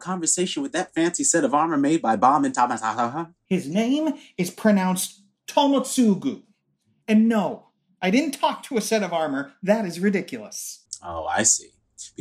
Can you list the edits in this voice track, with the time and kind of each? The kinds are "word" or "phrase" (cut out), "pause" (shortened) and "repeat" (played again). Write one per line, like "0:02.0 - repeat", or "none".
none